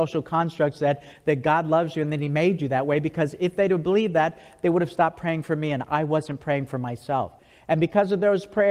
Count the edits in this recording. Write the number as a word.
zero